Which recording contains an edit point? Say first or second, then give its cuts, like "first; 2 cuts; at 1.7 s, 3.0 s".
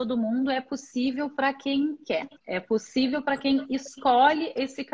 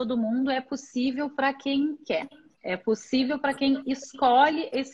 first; 1 cut; at 2.4 s